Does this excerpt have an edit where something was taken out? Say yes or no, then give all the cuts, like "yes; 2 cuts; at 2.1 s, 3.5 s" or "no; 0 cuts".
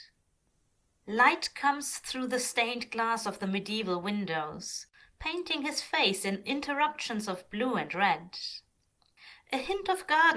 no; 0 cuts